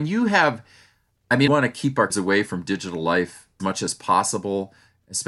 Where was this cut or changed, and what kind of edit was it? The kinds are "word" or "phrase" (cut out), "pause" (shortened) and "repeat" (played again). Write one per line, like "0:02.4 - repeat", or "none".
0:01.5 - phrase
0:02.1 - word
0:03.6 - word